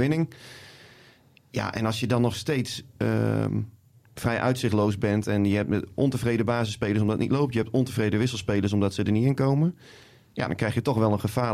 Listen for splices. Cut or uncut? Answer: uncut